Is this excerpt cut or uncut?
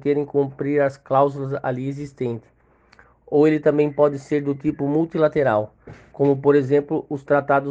uncut